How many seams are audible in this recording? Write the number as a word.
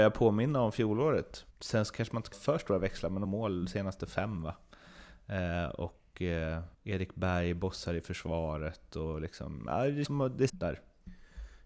six